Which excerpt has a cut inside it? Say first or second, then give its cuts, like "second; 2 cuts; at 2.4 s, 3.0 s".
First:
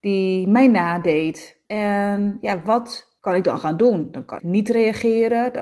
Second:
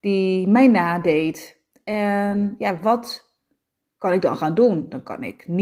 first; 3 cuts; at 1.6 s, 3.2 s, 4.4 s